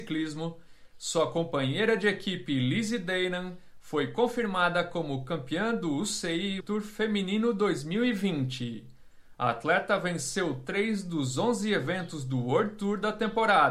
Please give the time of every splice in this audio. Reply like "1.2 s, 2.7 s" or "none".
6.6 s